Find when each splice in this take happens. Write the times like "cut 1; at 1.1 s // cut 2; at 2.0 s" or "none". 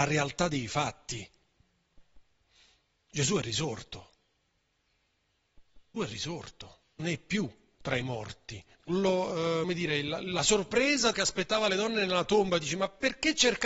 cut 1; at 6.0 s // cut 2; at 7.0 s // cut 3; at 8.8 s // cut 4; at 9.6 s // cut 5; at 11.1 s